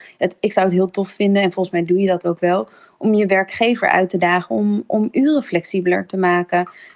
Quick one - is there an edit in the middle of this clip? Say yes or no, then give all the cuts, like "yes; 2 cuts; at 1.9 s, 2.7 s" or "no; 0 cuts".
no; 0 cuts